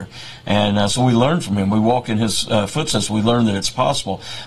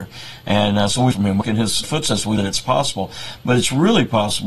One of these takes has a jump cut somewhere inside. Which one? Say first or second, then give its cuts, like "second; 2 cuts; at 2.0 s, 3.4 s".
second; 4 cuts; at 1.1 s, 1.4 s, 1.8 s, 2.4 s